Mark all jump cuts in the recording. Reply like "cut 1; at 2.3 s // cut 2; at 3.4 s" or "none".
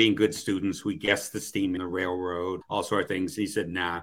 cut 1; at 1.8 s // cut 2; at 2.6 s // cut 3; at 3.1 s